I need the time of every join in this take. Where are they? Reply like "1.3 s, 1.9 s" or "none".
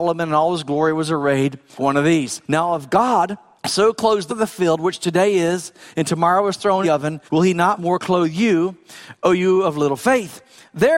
1.8 s, 2.4 s, 3.6 s, 4.3 s, 6.8 s, 7.3 s, 7.8 s